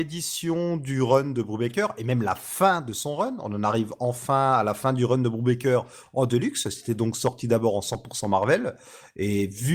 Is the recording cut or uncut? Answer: uncut